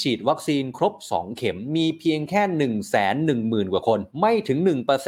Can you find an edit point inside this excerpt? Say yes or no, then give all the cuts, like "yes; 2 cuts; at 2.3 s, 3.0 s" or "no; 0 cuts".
yes; 1 cut; at 4.1 s